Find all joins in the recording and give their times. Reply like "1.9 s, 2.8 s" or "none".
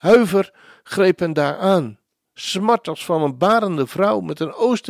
none